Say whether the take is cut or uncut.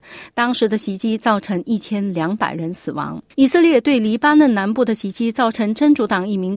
cut